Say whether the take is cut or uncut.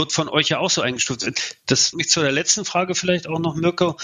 cut